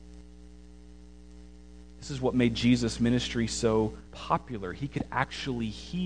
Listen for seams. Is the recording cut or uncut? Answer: cut